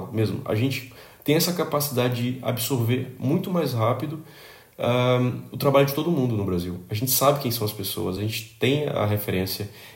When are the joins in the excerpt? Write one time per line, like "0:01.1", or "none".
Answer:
none